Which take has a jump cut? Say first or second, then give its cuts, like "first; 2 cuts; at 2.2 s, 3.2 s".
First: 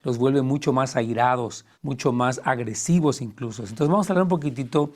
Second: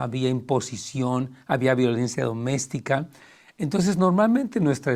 first; 1 cut; at 1.7 s